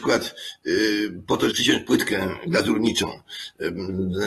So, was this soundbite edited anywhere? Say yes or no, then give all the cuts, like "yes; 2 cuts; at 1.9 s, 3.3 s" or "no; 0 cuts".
yes; 1 cut; at 1.5 s